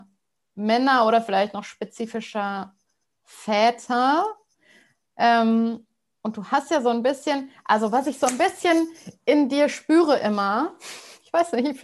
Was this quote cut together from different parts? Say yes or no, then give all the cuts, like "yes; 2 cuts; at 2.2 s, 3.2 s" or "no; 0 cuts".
no; 0 cuts